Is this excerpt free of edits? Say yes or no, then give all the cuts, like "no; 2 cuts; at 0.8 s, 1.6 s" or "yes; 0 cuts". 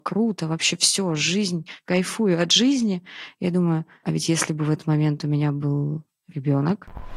no; 2 cuts; at 1.9 s, 4.0 s